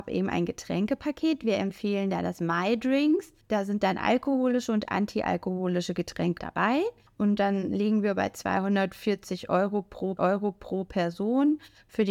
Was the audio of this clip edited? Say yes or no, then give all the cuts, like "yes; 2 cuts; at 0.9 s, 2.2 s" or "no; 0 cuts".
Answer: yes; 4 cuts; at 3.4 s, 6.4 s, 7.1 s, 10.2 s